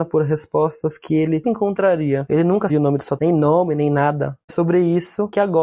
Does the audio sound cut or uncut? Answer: cut